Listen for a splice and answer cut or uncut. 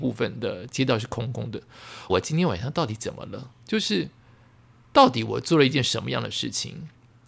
cut